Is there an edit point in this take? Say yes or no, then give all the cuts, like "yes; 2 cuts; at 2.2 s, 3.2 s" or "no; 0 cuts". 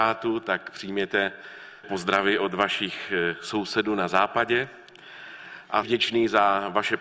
yes; 2 cuts; at 1.8 s, 5.8 s